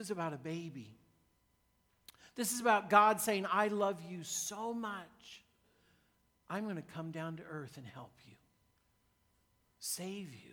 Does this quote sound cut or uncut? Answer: uncut